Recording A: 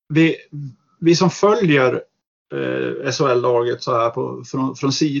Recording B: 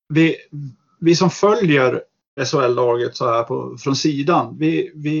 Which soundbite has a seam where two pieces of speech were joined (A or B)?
B